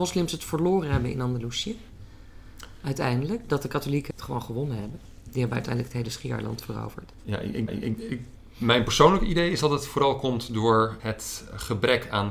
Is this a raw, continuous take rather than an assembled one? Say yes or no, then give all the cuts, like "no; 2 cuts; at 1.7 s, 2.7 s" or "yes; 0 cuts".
no; 3 cuts; at 4.1 s, 7.7 s, 11.0 s